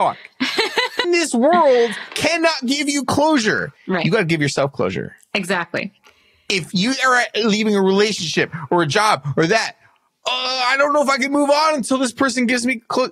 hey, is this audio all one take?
no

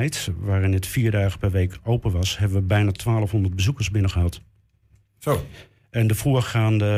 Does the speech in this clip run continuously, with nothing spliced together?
yes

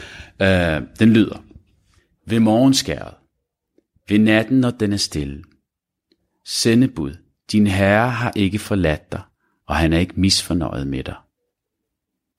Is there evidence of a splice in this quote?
no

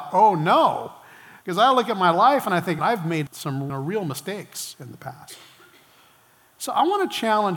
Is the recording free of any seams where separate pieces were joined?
no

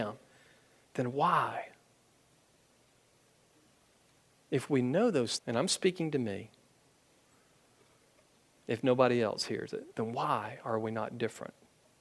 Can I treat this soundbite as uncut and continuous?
no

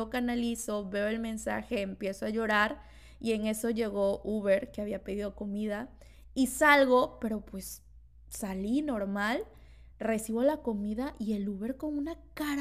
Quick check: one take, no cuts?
yes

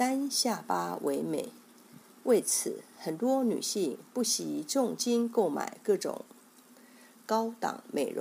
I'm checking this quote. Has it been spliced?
no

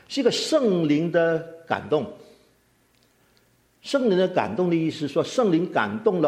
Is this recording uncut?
yes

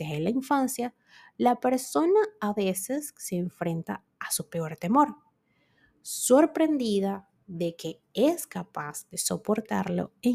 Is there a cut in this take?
no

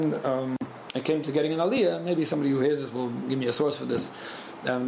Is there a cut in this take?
no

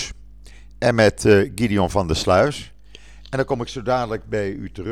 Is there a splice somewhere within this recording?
no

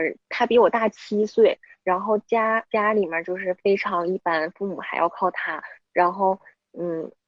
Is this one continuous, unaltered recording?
no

